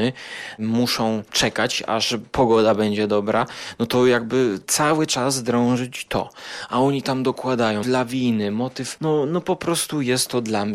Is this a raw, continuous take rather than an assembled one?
no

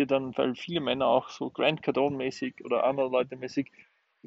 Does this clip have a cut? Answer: no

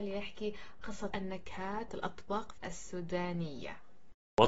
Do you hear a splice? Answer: yes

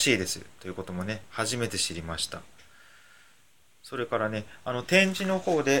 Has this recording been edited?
no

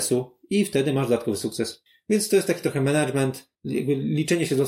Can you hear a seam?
no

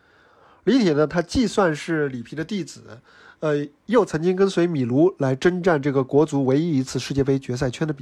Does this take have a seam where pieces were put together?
no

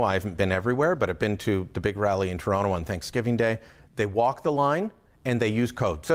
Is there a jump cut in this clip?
no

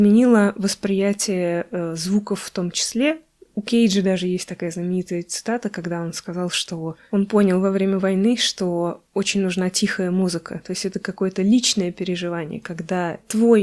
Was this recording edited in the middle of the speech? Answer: no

